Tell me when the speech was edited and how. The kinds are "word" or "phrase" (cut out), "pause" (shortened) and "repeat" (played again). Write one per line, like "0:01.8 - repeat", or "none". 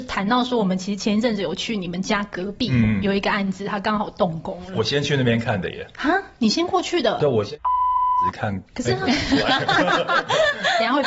0:08.7 - pause